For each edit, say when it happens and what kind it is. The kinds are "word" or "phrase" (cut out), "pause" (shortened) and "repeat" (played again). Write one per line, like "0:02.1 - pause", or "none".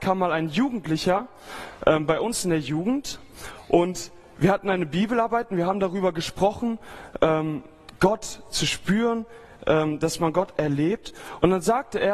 none

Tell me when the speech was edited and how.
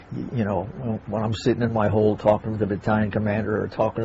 none

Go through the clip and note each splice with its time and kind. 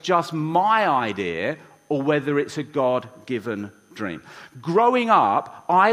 none

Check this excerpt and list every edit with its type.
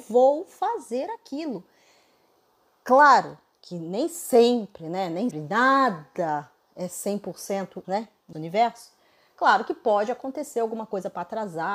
0:05.3 - word
0:07.8 - word
0:08.3 - word

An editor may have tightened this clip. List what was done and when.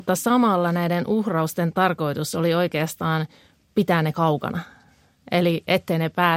none

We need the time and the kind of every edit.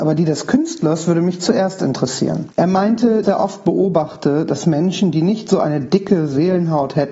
0:02.5 - pause
0:03.2 - word

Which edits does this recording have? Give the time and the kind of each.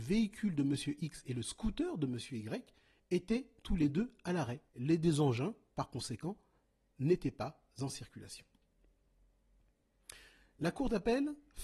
0:04.7 - pause

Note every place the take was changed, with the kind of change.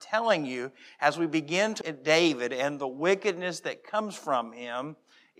0:01.8 - word

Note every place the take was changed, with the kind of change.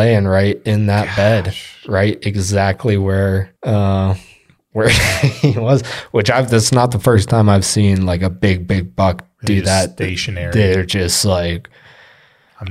0:03.6 - pause

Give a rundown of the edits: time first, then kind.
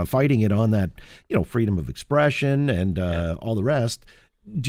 none

